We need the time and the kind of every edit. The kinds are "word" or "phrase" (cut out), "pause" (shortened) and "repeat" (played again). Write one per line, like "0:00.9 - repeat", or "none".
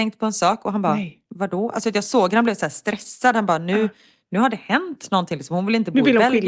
none